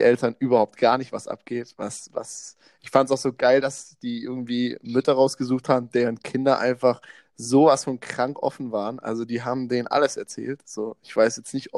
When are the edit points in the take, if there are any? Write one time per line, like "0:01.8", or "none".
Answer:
none